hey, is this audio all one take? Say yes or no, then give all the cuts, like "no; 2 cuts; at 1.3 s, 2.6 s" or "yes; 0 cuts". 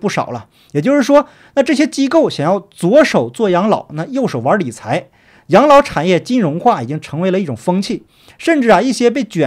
yes; 0 cuts